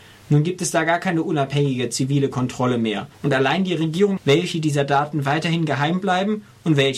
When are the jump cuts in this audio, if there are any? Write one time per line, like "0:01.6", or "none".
0:03.1
0:04.2